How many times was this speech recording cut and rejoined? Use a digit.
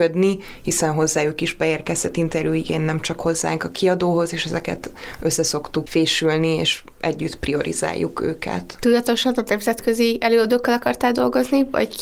0